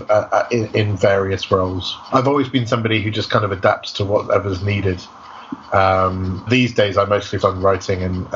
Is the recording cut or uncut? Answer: cut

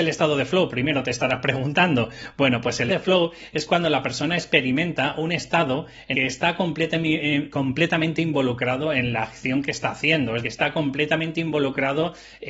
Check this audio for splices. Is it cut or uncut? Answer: cut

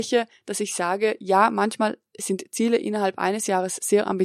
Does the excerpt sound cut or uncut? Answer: uncut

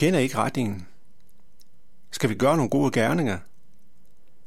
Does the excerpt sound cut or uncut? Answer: uncut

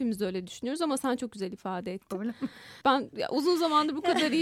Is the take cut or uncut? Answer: cut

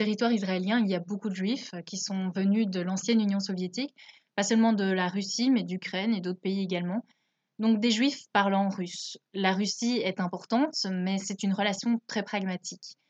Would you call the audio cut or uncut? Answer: uncut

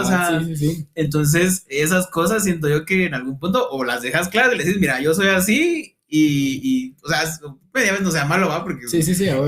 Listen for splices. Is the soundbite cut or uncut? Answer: uncut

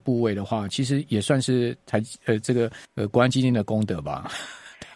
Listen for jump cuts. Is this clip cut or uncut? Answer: cut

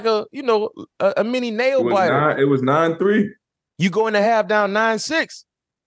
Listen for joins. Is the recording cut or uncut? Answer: uncut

